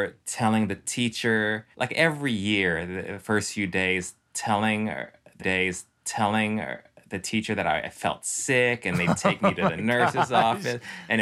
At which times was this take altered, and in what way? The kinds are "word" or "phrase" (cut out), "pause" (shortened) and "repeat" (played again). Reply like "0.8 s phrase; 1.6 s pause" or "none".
1.7 s pause; 5.4 s repeat